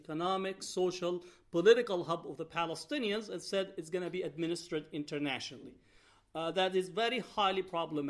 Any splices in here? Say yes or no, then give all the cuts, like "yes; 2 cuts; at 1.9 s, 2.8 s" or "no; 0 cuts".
no; 0 cuts